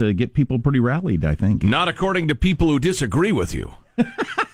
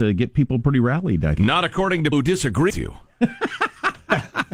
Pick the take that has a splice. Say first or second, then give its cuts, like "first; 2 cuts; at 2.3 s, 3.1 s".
second; 3 cuts; at 1.4 s, 2.1 s, 2.7 s